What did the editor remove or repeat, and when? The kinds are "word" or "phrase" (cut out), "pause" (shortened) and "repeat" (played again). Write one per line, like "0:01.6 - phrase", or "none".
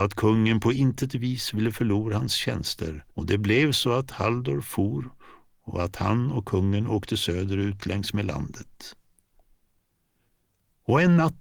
0:03.1 - pause

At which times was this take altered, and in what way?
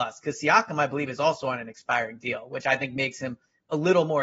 none

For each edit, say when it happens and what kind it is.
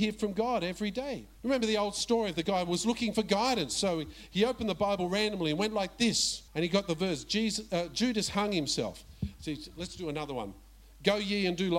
0:01.3 - pause
0:06.5 - pause

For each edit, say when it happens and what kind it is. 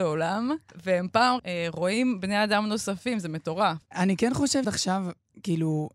0:01.4 - word
0:03.8 - pause
0:04.6 - word

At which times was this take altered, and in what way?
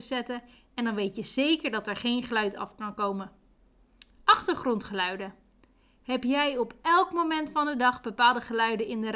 none

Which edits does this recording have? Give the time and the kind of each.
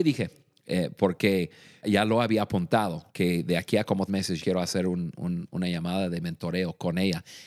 0:01.8 - word
0:03.1 - pause
0:04.1 - word
0:04.4 - word

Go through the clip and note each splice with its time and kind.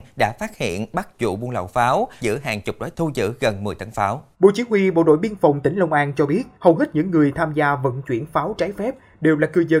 0:01.1 - phrase
0:02.2 - word
0:02.9 - word
0:04.3 - pause
0:06.5 - pause

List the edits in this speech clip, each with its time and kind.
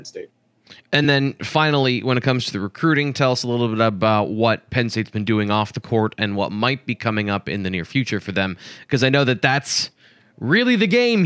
none

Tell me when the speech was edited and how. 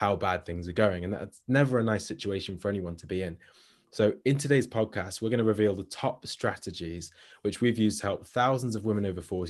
none

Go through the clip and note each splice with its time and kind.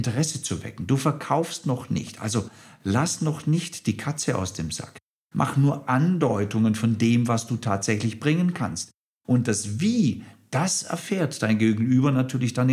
none

